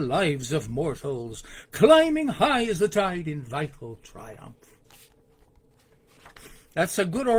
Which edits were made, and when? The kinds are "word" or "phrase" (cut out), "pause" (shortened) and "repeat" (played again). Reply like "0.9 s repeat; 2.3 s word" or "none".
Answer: none